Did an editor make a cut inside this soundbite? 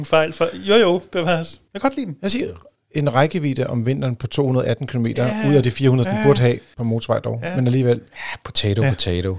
no; 0 cuts

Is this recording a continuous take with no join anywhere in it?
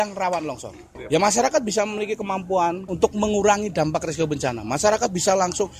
no; 1 cut; at 2.9 s

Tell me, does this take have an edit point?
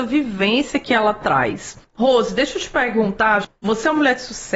no; 0 cuts

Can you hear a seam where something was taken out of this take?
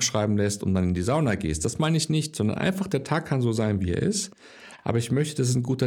no; 0 cuts

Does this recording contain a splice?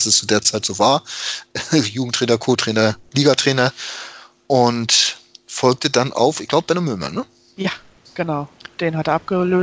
no; 0 cuts

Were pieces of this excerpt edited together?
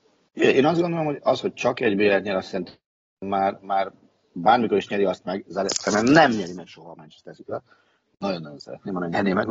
no; 0 cuts

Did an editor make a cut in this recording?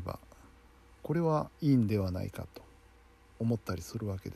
yes; 1 cut; at 1.5 s

